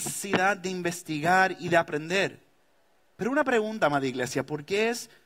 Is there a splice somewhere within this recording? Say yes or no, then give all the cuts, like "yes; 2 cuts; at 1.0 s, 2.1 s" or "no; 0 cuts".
no; 0 cuts